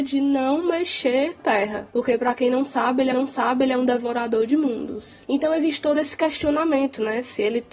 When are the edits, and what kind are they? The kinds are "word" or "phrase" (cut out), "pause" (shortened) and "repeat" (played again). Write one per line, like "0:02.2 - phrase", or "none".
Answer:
0:01.4 - phrase
0:03.1 - repeat